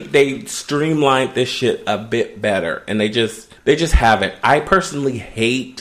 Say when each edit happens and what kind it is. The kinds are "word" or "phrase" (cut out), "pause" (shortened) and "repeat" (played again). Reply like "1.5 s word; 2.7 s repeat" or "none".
3.6 s pause